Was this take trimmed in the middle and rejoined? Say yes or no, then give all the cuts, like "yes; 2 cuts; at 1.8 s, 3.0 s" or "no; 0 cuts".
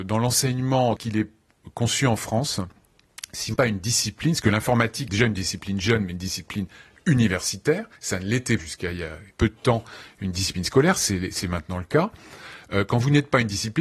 yes; 6 cuts; at 1.0 s, 3.5 s, 5.1 s, 8.0 s, 8.6 s, 9.3 s